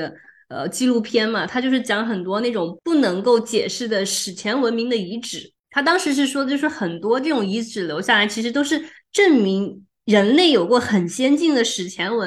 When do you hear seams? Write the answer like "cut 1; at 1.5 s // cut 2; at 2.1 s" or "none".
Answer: cut 1; at 5.6 s